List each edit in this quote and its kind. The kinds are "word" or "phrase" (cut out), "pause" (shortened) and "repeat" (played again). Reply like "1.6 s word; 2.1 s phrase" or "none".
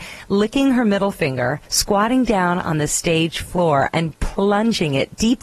1.6 s pause